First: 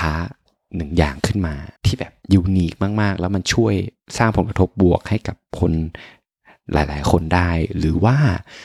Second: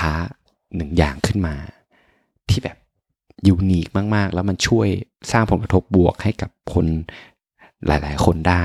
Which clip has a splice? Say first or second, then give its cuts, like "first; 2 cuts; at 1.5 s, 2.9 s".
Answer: first; 2 cuts; at 1.8 s, 2.2 s